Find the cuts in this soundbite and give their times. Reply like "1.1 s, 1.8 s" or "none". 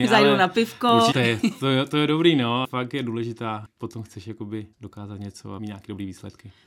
1.1 s, 2.6 s, 3.7 s, 4.7 s, 5.6 s